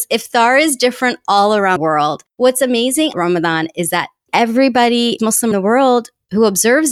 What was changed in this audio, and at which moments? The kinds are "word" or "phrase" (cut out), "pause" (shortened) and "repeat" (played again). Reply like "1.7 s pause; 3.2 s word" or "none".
1.8 s word; 3.1 s word; 5.2 s word; 5.5 s word

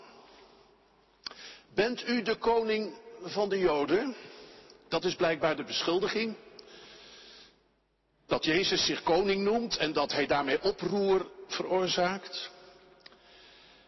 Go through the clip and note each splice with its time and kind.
none

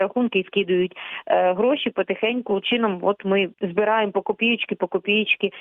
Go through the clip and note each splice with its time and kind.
2.6 s word; 3.5 s pause

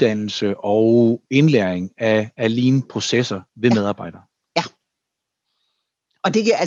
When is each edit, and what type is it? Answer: 3.5 s pause

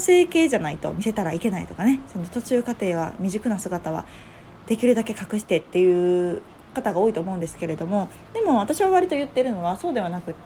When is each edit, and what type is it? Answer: none

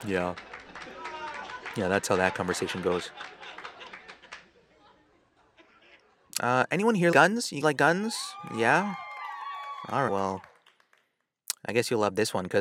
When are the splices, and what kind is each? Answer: 7.1 s word; 7.6 s word; 10.1 s word

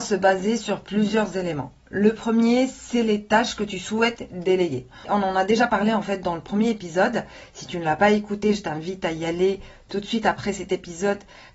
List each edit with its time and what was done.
none

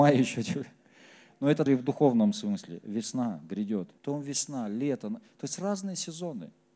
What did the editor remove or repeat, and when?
1.7 s word; 4.0 s pause

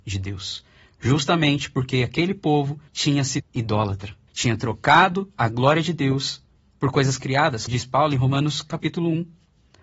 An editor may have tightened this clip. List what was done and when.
2.9 s pause; 3.4 s word; 4.3 s pause; 6.6 s pause; 7.7 s word

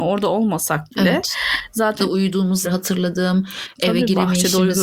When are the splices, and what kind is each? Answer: 2.0 s word; 2.6 s word

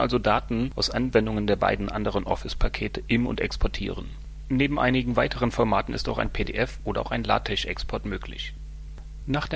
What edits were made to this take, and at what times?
none

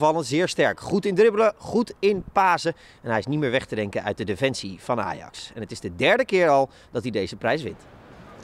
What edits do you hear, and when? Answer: none

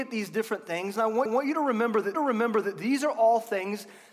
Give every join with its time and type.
1.3 s repeat; 2.1 s repeat

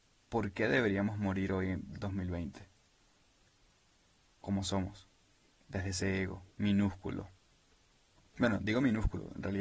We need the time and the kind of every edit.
6.5 s pause

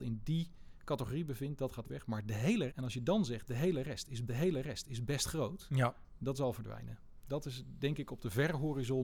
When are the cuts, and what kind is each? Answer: 1.8 s word; 2.7 s word; 4.3 s repeat

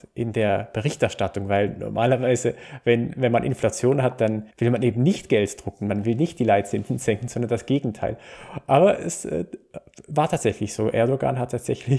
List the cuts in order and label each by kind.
4.5 s pause

